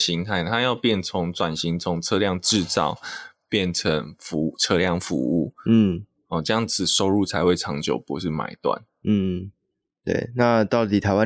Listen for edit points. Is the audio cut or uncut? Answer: uncut